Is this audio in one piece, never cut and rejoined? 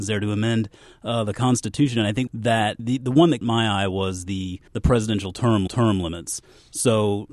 no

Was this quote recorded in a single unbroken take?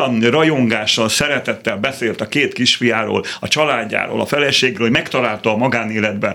yes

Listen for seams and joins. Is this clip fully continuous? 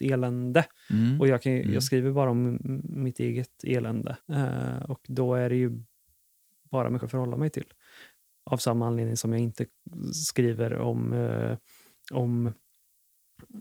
no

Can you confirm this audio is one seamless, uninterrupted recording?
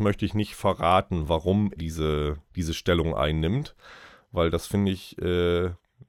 no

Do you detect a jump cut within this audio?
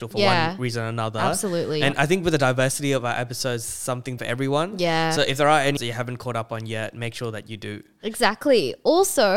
yes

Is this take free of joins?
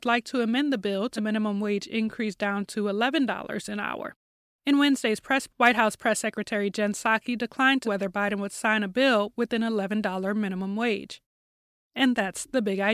no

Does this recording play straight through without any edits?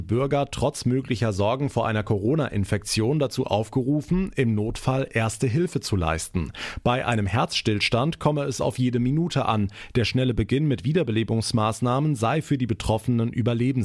yes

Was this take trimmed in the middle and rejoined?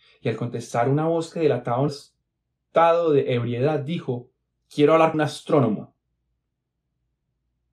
yes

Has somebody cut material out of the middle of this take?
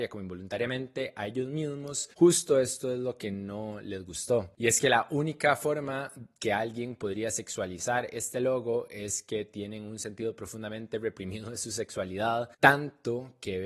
yes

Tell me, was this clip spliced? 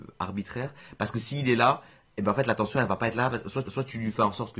yes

